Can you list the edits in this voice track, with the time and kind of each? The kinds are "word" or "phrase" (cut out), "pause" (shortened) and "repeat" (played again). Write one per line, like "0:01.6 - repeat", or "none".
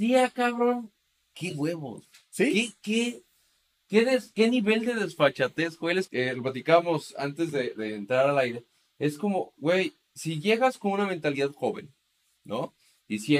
0:06.1 - word
0:07.7 - word